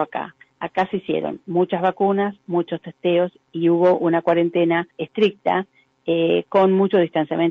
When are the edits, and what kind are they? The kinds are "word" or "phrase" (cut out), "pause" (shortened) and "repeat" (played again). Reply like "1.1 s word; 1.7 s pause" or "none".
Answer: 2.4 s pause; 4.9 s pause